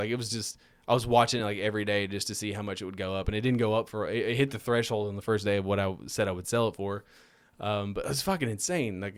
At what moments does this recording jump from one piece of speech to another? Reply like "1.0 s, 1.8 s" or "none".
none